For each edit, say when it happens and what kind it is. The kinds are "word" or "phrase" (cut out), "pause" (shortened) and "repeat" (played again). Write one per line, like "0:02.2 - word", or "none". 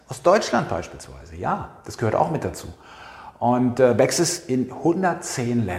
none

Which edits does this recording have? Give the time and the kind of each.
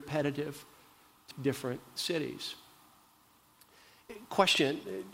0:01.3 - word

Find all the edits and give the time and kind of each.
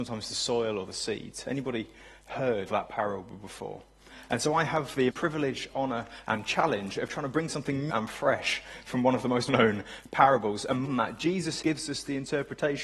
0:02.7 - word
0:05.1 - word
0:07.9 - word
0:09.5 - word
0:10.8 - word
0:11.6 - word

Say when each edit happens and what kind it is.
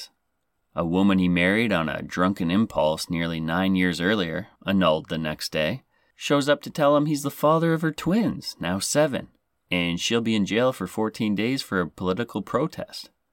0:04.6 - pause

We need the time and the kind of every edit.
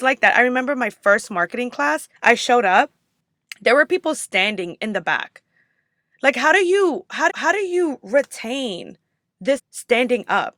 0:02.2 - pause
0:07.3 - repeat
0:09.6 - word

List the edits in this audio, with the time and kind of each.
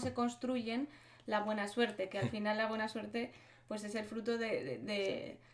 none

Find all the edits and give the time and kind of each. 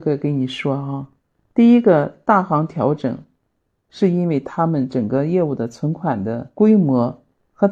none

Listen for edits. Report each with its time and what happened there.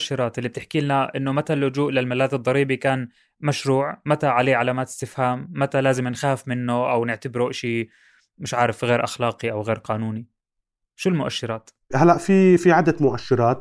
none

